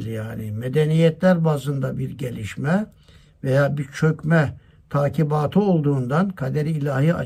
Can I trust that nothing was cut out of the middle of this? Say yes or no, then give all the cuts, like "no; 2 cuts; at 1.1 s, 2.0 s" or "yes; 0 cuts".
yes; 0 cuts